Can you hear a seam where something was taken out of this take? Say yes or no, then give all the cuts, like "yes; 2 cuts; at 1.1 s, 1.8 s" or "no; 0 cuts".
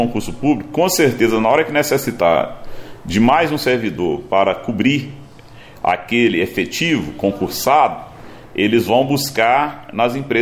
no; 0 cuts